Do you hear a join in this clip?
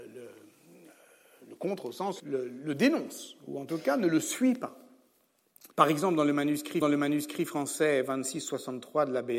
yes; 3 cuts; at 2.2 s, 5.7 s, 6.8 s

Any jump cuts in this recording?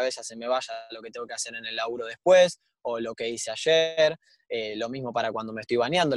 no; 0 cuts

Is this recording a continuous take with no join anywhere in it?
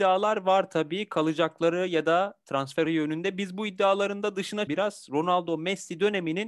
no; 2 cuts; at 2.8 s, 4.7 s

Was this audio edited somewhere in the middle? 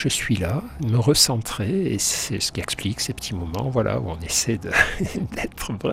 no; 0 cuts

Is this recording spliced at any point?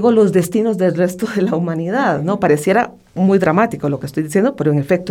no; 0 cuts

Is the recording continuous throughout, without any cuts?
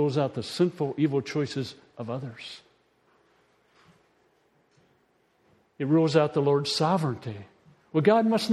yes; 0 cuts

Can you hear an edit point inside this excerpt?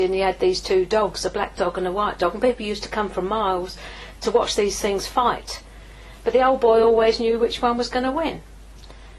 no; 0 cuts

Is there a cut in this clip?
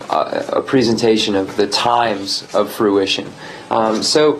no; 0 cuts

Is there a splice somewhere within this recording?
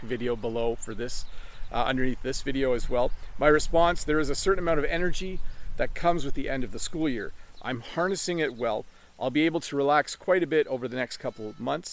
no; 0 cuts

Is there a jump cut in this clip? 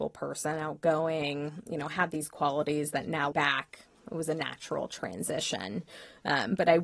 yes; 1 cut; at 3.3 s

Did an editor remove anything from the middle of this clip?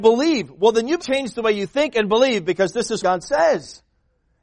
yes; 2 cuts; at 1.0 s, 3.0 s

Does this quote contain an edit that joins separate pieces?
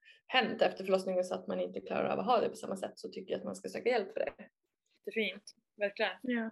no; 0 cuts

